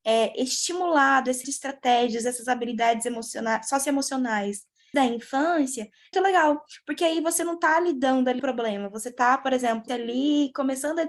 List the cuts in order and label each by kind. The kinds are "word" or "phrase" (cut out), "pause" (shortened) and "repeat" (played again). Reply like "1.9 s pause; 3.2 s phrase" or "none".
1.4 s word; 4.9 s word; 6.1 s word; 8.4 s word; 9.9 s phrase